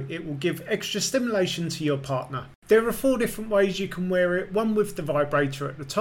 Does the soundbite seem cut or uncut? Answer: uncut